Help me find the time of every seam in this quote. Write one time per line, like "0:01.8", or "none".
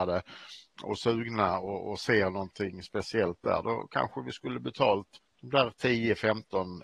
0:05.2